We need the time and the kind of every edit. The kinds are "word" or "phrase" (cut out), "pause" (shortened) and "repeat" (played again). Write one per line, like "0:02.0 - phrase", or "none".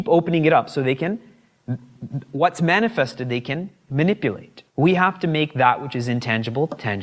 0:04.7 - pause